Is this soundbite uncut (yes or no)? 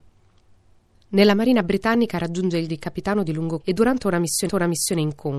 no